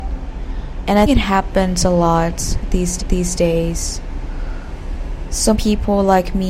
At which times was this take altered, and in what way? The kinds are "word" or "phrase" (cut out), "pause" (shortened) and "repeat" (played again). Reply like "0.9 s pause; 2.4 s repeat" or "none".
1.0 s word; 3.0 s repeat; 5.5 s word